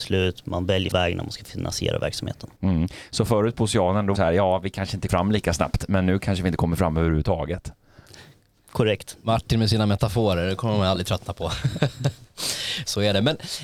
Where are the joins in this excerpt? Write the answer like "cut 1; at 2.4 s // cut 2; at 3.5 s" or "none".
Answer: cut 1; at 0.9 s // cut 2; at 2.6 s // cut 3; at 4.1 s // cut 4; at 5.1 s